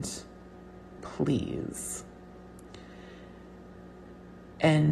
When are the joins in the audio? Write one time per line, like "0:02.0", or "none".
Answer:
0:01.0